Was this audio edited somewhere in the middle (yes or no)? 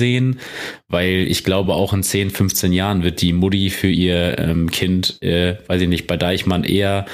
no